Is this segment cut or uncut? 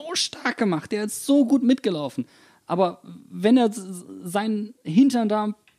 uncut